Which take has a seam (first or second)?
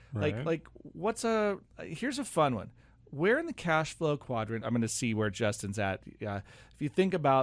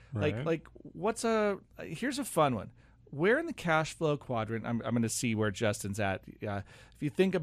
first